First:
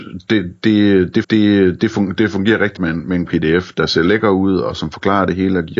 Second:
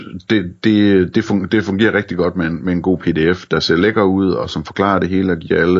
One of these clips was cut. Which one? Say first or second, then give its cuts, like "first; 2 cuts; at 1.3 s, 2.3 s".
first; 3 cuts; at 1.2 s, 2.8 s, 3.3 s